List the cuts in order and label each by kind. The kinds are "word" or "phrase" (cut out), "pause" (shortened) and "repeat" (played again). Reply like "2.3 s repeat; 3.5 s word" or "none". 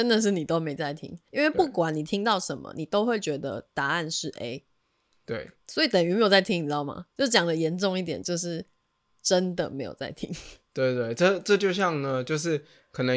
1.3 s pause